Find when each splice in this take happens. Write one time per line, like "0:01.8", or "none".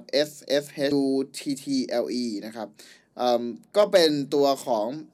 0:00.9